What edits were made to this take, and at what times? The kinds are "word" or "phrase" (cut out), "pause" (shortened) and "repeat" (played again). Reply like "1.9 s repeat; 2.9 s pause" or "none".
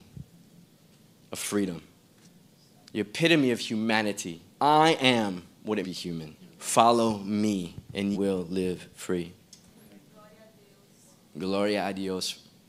2.2 s pause; 4.5 s pause; 5.8 s phrase; 6.4 s pause; 8.1 s word